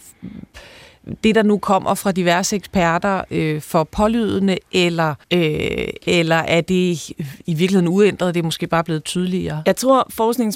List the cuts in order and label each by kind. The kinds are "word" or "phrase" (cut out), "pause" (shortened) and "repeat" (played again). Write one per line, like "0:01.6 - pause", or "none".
0:05.2 - pause